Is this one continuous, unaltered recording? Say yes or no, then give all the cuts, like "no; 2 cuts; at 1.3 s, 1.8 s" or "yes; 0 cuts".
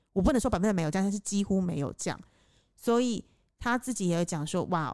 yes; 0 cuts